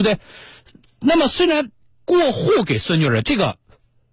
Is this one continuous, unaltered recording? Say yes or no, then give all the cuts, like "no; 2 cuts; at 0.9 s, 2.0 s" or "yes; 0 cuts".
yes; 0 cuts